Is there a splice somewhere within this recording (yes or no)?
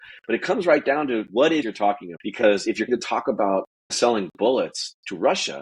yes